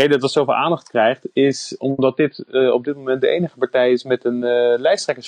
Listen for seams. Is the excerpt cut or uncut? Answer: uncut